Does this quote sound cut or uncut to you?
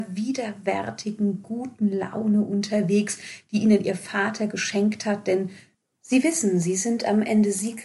uncut